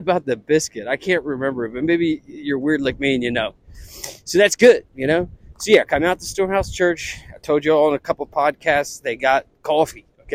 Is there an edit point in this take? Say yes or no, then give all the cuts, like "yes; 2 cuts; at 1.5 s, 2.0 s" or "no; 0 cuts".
no; 0 cuts